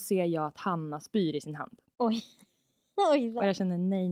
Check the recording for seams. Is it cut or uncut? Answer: uncut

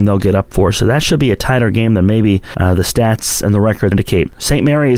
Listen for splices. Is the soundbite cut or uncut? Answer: cut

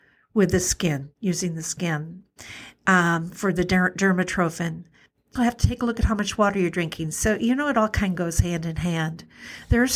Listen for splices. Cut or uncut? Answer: cut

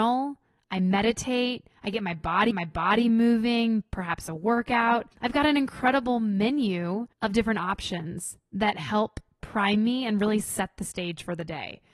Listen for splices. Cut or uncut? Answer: cut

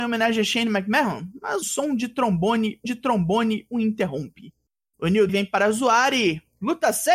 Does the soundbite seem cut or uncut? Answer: cut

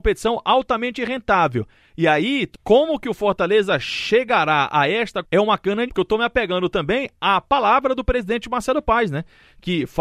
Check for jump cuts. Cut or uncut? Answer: cut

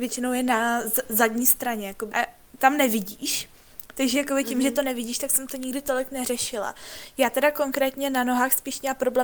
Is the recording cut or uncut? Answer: cut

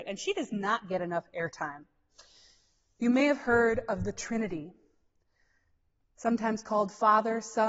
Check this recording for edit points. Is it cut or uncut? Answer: uncut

